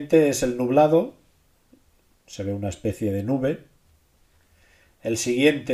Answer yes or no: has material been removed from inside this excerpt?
no